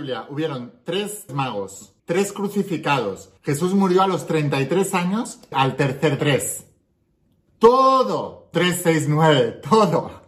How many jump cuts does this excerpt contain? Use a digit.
6